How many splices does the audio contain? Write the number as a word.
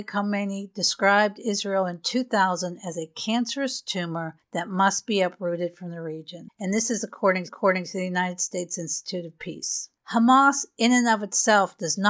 one